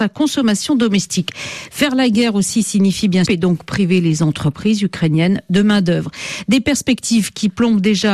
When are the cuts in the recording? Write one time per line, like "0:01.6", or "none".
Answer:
0:03.2